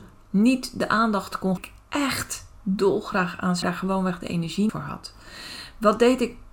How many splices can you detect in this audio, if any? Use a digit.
3